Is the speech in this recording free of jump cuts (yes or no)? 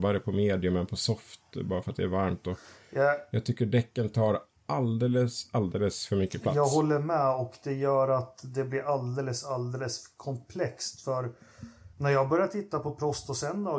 no